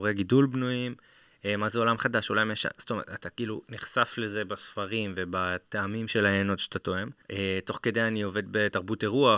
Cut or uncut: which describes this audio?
cut